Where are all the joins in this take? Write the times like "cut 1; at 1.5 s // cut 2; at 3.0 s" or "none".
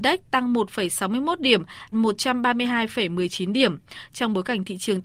cut 1; at 1.9 s